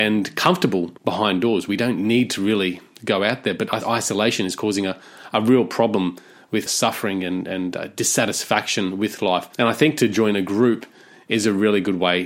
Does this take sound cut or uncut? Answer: cut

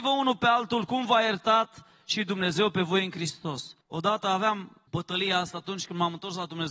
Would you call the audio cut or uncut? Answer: cut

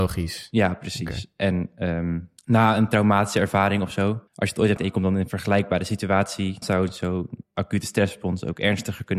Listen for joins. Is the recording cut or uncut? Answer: cut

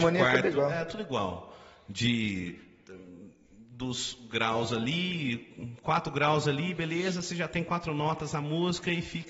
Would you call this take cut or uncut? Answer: uncut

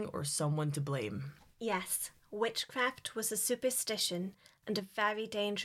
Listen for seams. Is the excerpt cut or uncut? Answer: uncut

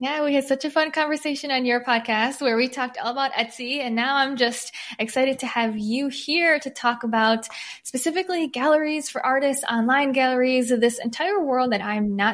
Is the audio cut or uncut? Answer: uncut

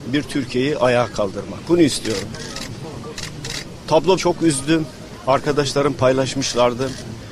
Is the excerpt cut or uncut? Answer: cut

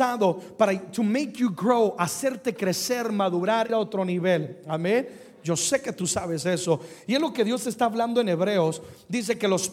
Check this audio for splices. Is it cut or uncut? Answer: cut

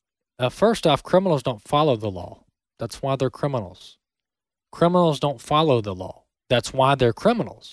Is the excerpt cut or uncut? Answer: uncut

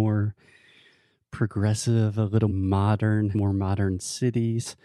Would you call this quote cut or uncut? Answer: cut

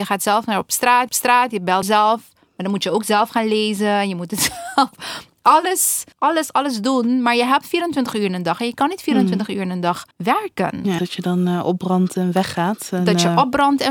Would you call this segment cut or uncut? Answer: cut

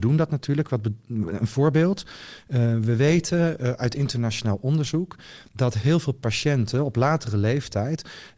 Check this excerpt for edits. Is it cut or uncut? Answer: uncut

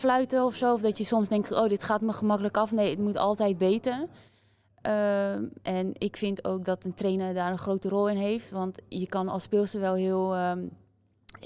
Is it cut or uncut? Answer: uncut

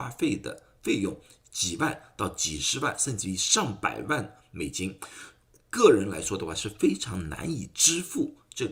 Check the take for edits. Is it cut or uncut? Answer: uncut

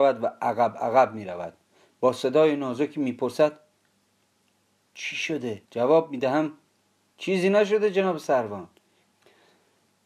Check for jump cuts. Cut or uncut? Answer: cut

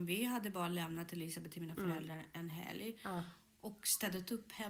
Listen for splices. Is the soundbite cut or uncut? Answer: uncut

